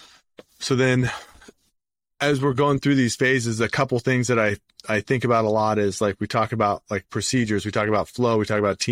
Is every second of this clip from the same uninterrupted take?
yes; 0 cuts

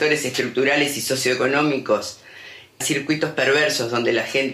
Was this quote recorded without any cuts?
no; 1 cut; at 2.8 s

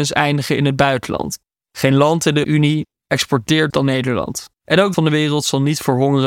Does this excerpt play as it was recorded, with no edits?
no; 5 cuts; at 1.4 s, 2.4 s, 3.7 s, 4.5 s, 4.9 s

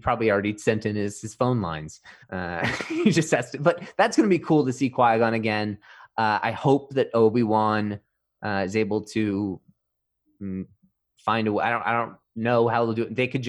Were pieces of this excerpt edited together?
yes; 1 cut; at 2.2 s

